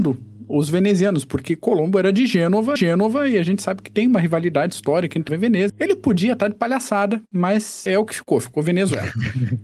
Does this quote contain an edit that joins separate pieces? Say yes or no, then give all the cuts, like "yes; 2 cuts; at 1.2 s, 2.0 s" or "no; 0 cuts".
yes; 4 cuts; at 2.8 s, 5.3 s, 5.7 s, 7.9 s